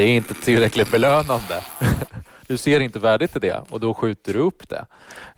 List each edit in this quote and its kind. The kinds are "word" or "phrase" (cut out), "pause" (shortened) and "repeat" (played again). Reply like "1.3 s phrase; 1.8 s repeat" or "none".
none